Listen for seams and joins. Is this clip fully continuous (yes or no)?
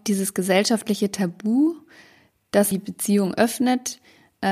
no